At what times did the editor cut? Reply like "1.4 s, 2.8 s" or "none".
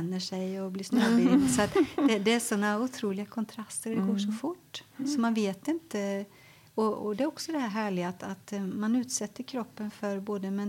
none

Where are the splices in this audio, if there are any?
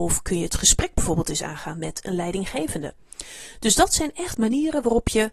none

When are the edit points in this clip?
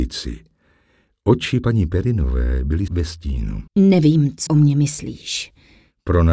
2.9 s, 3.7 s, 4.5 s

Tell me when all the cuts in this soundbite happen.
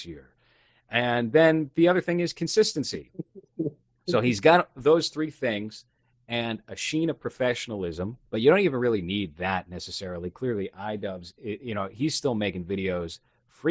8.3 s

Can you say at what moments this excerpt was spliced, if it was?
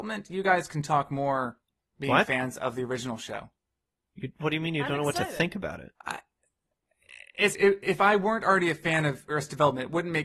6.0 s, 7.5 s

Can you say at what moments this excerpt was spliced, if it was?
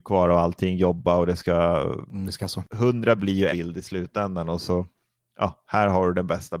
2.4 s, 3.2 s, 3.5 s

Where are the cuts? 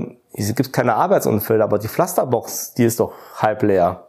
none

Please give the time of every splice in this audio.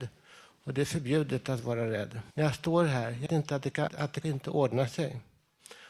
2.3 s, 3.3 s, 3.9 s, 4.2 s

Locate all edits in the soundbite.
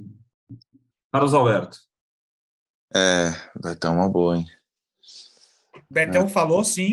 none

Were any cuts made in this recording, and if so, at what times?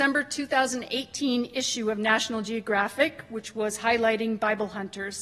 none

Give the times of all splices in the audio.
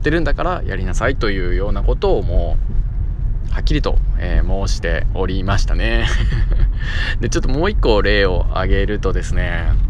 none

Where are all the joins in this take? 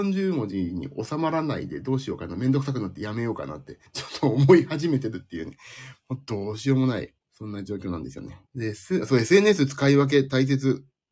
3.9 s, 7.2 s, 8.5 s

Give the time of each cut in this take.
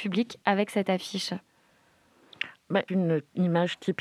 2.9 s

